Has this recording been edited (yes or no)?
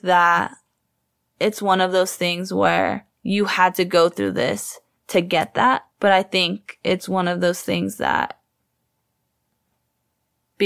yes